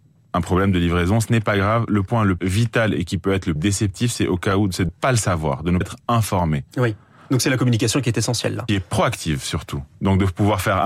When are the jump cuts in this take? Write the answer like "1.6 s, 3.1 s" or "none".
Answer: 2.4 s, 3.0 s, 3.6 s, 4.9 s, 5.8 s, 8.7 s